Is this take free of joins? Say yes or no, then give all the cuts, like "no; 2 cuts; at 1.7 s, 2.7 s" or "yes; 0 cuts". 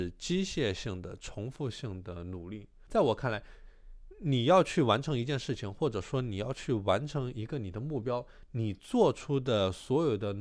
no; 1 cut; at 2.9 s